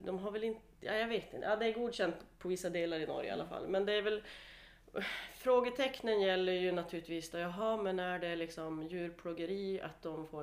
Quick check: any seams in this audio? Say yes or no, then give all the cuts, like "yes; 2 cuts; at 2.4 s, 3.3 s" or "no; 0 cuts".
no; 0 cuts